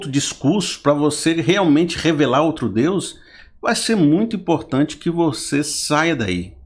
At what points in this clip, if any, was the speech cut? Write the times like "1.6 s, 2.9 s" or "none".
none